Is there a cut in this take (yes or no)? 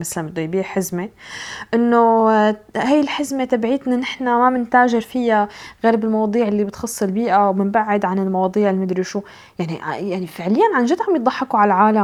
no